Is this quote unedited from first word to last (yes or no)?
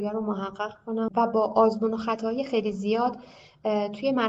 yes